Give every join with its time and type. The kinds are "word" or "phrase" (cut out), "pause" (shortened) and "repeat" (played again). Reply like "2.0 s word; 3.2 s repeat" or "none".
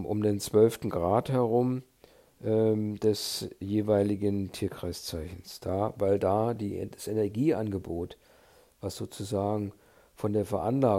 none